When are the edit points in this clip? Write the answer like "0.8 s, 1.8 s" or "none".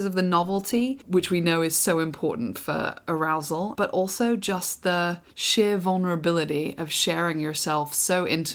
3.7 s, 5.3 s